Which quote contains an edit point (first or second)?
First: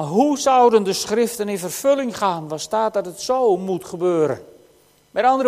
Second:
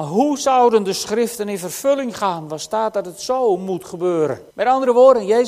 second